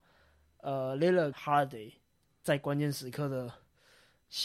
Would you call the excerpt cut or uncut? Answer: cut